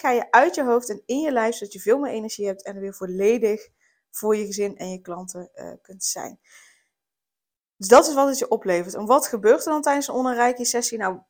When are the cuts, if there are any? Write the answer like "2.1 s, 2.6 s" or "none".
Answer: none